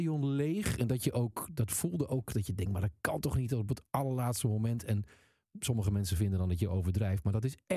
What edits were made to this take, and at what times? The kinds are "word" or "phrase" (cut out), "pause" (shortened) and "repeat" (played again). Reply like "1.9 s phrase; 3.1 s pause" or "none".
none